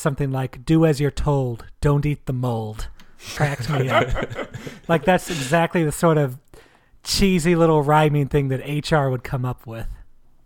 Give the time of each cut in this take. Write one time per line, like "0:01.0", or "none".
0:03.4